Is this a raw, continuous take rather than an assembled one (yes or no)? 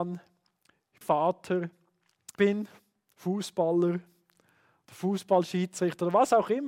no